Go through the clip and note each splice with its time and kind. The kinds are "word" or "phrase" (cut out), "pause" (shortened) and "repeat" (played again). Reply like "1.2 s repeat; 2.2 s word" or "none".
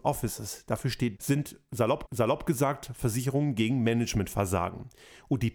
1.2 s word; 2.1 s repeat

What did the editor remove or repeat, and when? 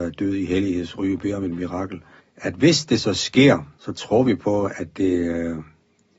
2.2 s pause; 3.8 s pause

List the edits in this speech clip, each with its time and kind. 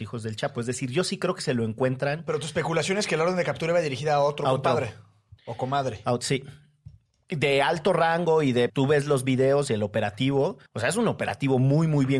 5.4 s pause; 7.1 s pause; 8.7 s word; 10.7 s pause

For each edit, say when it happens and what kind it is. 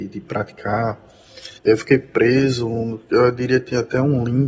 1.6 s pause

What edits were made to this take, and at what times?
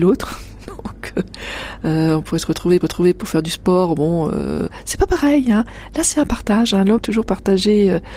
2.8 s repeat; 7.0 s phrase

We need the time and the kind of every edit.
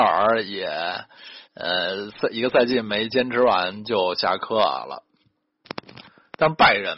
1.4 s pause; 6.1 s pause

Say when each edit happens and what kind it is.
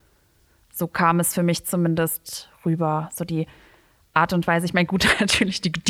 none

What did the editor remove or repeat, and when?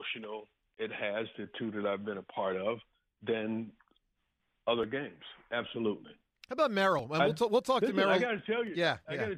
none

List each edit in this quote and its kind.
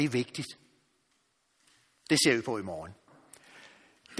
none

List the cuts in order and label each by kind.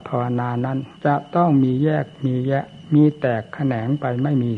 1.0 s pause

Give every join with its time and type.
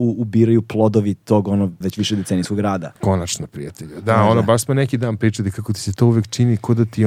1.8 s word; 3.0 s pause

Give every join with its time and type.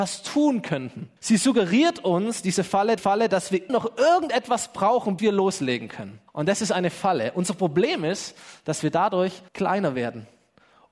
1.2 s pause; 3.0 s repeat; 3.7 s word; 5.2 s word; 6.3 s pause; 9.5 s pause

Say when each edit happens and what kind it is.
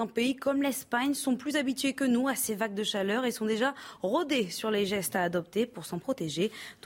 none

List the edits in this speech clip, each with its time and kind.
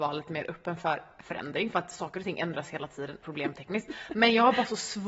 3.2 s phrase

